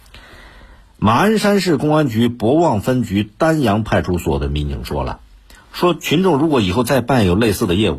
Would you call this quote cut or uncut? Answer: uncut